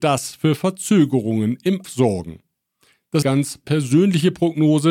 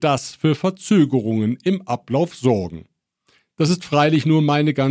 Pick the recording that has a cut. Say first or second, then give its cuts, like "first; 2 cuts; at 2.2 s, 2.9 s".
first; 2 cuts; at 1.8 s, 3.2 s